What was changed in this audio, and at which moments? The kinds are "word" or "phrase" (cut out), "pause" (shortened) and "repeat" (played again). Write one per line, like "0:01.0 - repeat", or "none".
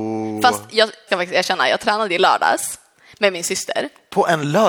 0:01.1 - word